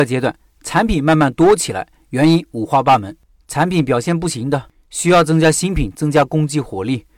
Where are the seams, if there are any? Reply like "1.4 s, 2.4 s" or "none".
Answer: none

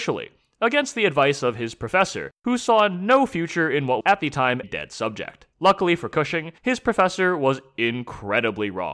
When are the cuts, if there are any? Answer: 2.4 s, 4.0 s, 4.6 s, 5.5 s, 6.6 s

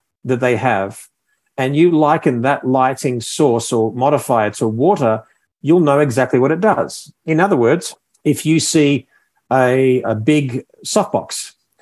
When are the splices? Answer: 10.0 s

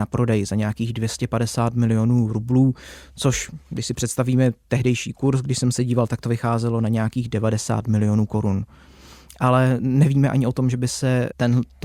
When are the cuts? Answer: none

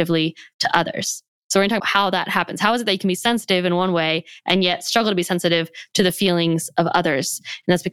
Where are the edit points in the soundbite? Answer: 1.3 s, 1.8 s

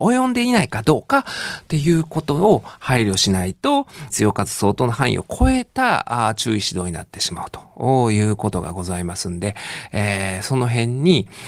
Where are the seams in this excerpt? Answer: 4.1 s

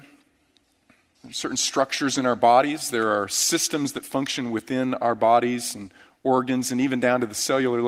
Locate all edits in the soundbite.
none

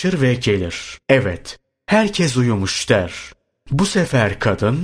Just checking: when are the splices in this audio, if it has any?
1.0 s

